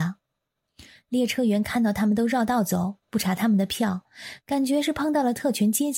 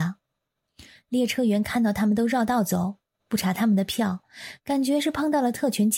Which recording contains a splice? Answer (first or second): first